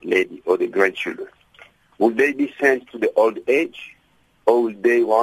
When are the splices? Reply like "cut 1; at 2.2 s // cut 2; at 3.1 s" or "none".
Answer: none